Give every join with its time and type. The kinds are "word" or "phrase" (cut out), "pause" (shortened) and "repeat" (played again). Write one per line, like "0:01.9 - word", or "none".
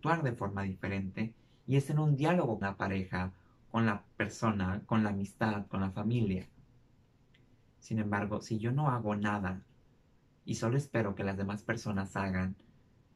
0:02.6 - word